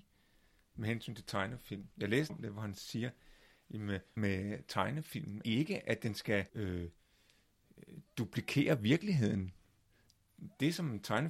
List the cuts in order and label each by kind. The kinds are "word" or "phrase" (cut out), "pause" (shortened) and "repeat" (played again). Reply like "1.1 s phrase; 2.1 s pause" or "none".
1.9 s pause; 2.3 s word; 4.2 s word; 5.4 s word; 6.5 s pause